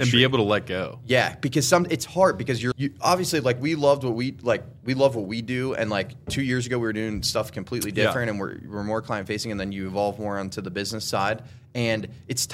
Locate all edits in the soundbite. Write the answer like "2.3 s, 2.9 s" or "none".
2.7 s